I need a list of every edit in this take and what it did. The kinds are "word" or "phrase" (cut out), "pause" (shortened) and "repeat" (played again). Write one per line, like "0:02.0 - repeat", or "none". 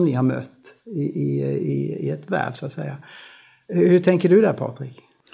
none